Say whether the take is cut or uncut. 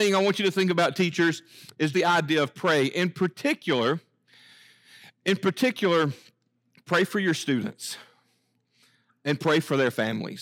cut